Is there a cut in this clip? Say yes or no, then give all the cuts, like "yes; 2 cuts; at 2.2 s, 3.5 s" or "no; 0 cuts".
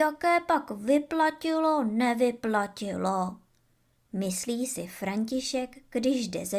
no; 0 cuts